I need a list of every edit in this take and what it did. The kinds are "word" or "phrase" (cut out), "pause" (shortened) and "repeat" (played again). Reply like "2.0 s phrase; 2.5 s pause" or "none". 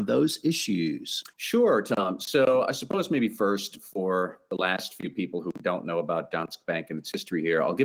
1.3 s pause